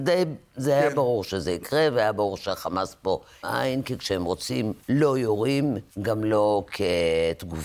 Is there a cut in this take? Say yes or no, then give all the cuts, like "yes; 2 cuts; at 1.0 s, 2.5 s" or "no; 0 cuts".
yes; 3 cuts; at 3.4 s, 4.8 s, 5.9 s